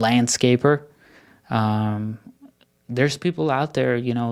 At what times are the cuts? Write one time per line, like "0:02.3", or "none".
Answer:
none